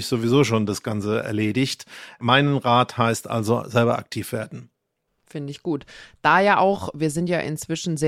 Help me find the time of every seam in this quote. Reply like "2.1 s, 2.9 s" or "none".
5.1 s